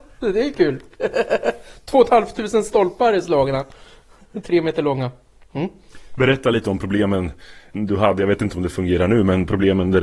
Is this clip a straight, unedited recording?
yes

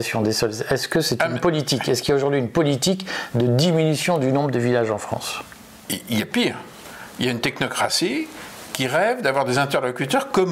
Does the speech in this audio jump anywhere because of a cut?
no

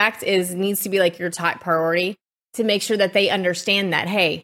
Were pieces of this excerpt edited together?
no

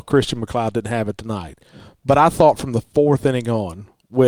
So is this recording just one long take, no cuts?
yes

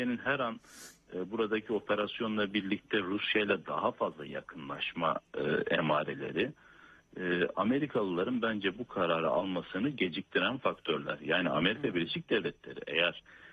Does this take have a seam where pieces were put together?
no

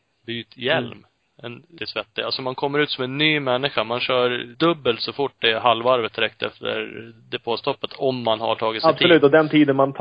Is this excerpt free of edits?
no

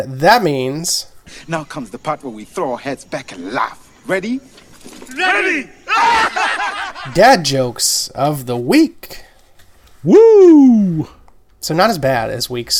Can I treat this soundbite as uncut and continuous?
yes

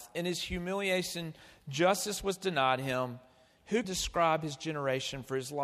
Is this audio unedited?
no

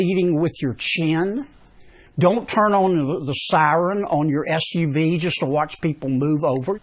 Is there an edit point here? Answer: no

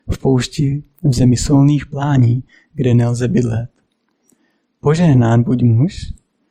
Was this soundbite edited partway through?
no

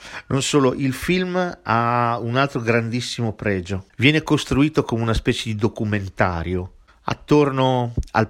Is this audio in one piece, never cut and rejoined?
yes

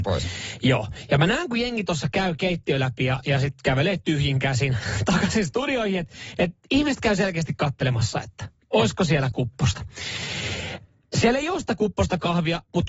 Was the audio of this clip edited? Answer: no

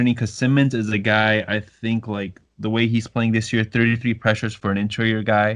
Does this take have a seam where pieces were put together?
no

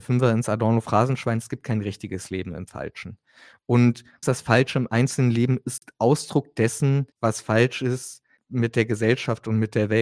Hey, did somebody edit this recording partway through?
yes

